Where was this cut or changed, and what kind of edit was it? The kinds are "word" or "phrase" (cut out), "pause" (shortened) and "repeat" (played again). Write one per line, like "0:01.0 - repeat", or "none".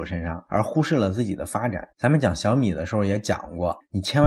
0:01.9 - pause